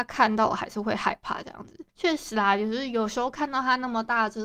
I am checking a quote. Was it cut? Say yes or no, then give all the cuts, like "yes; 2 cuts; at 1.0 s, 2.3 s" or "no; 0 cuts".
yes; 1 cut; at 1.9 s